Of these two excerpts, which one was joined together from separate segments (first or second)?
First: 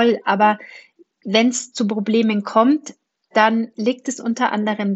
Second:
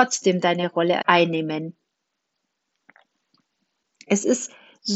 second